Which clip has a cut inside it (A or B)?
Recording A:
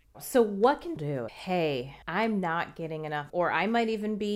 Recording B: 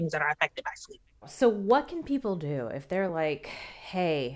A